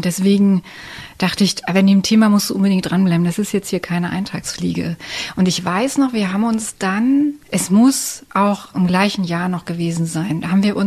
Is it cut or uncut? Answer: cut